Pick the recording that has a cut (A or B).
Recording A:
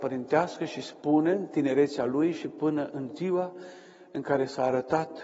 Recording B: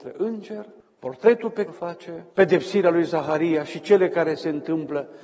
B